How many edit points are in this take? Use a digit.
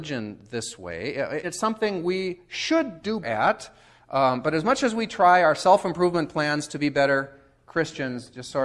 2